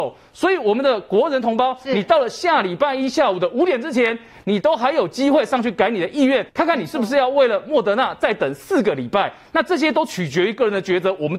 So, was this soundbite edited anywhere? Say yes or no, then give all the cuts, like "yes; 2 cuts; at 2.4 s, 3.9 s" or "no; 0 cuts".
yes; 1 cut; at 6.5 s